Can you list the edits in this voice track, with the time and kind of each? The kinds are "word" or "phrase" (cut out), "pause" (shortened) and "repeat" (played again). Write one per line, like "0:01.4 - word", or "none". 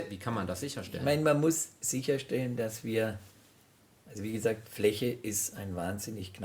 none